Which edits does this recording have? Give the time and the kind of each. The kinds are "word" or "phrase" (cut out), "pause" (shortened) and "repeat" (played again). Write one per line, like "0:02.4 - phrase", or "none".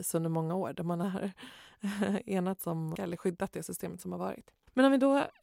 0:03.0 - phrase